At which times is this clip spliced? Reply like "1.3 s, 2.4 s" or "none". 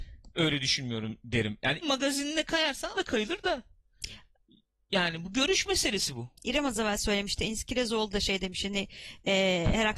1.2 s, 1.8 s, 2.9 s